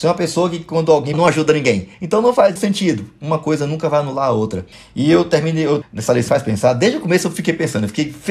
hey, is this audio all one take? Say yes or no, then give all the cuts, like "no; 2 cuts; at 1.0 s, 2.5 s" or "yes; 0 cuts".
no; 6 cuts; at 1.1 s, 1.9 s, 2.6 s, 4.7 s, 5.8 s, 6.3 s